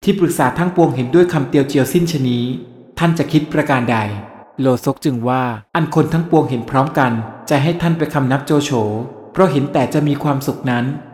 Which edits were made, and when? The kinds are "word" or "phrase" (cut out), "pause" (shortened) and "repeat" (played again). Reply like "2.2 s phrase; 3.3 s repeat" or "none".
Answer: 4.4 s pause; 5.7 s pause